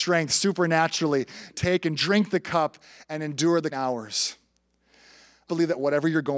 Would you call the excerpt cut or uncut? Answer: cut